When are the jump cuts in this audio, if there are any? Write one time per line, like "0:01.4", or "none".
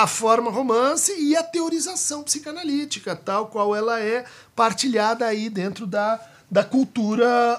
none